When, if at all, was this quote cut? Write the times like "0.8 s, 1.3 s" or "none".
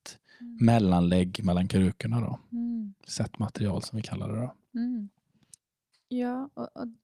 5.6 s